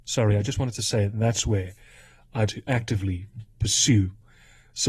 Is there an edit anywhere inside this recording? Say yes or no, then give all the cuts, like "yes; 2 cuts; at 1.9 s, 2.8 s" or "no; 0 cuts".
yes; 1 cut; at 2.5 s